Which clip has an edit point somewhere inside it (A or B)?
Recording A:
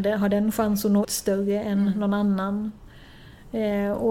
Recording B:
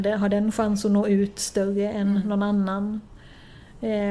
A